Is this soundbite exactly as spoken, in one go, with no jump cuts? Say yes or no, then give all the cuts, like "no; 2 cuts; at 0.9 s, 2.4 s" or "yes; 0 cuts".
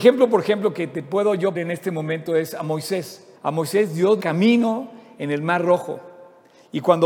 no; 3 cuts; at 1.5 s, 3.4 s, 4.2 s